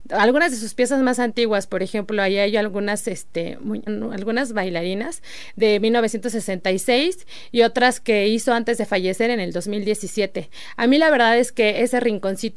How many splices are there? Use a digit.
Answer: 1